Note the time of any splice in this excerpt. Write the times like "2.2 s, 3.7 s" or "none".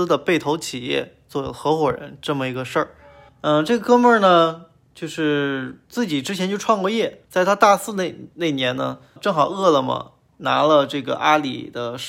3.3 s, 5.9 s, 7.3 s, 9.2 s